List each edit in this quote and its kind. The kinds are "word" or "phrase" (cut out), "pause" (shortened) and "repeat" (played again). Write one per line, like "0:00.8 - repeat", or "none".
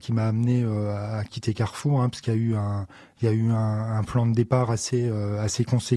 none